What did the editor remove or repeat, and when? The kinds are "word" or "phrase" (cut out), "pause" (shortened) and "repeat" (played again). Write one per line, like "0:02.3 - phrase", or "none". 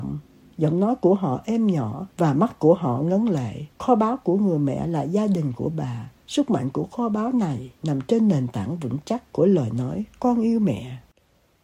0:02.1 - pause
0:03.7 - pause
0:06.2 - pause